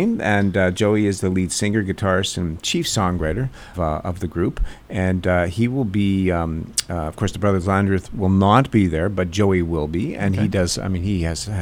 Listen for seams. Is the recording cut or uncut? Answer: cut